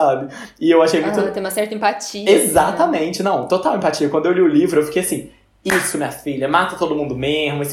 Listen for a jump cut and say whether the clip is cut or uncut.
uncut